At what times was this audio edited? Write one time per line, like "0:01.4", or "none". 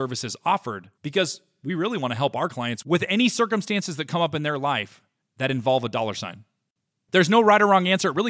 none